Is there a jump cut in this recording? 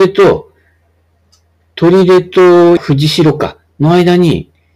yes; 1 cut; at 2.8 s

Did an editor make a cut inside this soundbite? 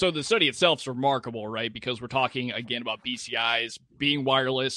no; 0 cuts

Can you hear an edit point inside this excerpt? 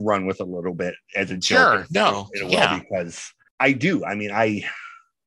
yes; 1 cut; at 3.5 s

